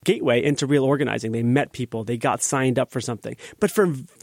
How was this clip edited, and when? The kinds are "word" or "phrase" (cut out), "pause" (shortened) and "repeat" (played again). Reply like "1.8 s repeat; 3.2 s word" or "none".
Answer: none